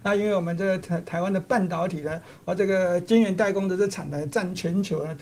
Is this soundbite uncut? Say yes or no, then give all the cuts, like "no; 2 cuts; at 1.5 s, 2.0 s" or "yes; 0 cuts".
yes; 0 cuts